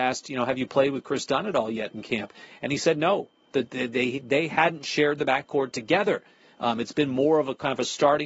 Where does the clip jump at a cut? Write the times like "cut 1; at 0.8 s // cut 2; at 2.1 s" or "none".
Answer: none